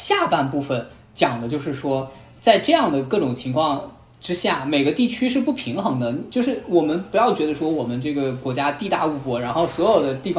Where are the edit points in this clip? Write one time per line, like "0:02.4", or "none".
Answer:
none